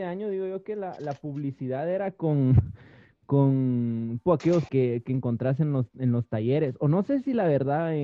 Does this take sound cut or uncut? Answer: cut